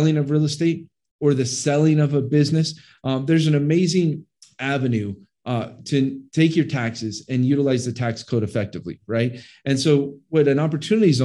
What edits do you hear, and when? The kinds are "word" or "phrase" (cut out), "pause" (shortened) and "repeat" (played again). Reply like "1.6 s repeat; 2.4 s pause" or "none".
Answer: none